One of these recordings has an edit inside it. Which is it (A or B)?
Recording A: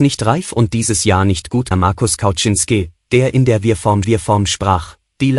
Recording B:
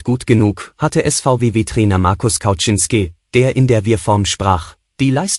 A